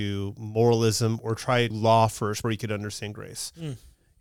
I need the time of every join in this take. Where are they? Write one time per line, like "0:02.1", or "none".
0:01.7
0:02.4